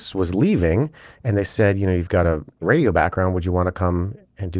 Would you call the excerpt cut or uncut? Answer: uncut